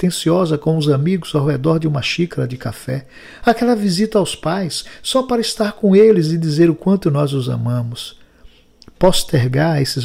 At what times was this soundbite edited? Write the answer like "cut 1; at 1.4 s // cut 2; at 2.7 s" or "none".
none